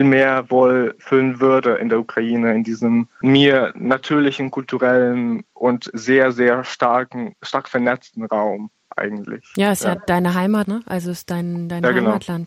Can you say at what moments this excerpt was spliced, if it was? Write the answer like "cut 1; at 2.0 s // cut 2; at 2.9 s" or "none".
cut 1; at 10.6 s